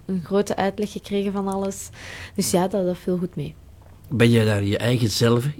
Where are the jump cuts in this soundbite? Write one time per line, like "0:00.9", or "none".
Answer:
none